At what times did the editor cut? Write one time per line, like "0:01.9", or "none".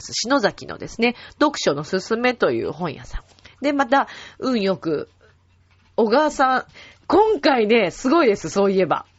none